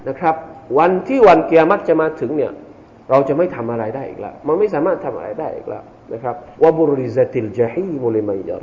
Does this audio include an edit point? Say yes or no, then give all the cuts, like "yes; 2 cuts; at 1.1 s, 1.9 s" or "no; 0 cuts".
yes; 1 cut; at 6.5 s